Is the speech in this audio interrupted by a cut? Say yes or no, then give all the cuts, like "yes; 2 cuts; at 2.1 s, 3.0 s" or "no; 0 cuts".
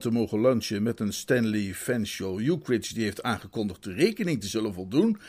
no; 0 cuts